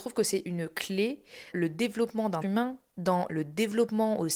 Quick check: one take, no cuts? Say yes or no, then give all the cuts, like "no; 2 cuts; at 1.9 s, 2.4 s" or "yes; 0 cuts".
no; 2 cuts; at 1.5 s, 2.4 s